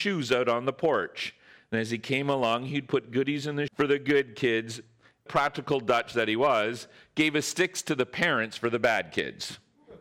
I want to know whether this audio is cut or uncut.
cut